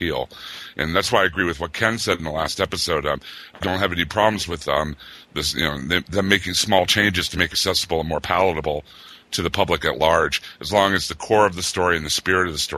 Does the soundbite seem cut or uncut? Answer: cut